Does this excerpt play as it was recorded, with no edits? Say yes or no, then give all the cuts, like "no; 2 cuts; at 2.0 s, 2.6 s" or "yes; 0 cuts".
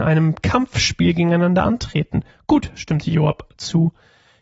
yes; 0 cuts